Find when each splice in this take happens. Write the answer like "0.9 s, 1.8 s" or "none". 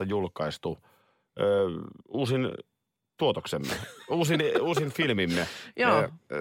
2.0 s